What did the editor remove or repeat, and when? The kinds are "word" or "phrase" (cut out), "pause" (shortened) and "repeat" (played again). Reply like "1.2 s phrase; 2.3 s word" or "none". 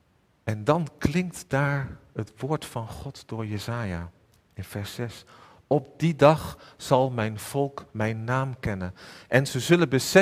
7.9 s pause